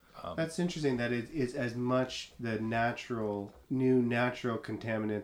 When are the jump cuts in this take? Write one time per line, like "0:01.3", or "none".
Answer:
0:03.6